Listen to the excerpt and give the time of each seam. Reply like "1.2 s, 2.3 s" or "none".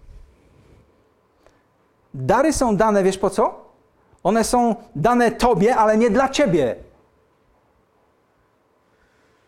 none

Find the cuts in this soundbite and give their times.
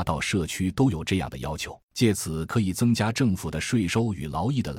1.8 s

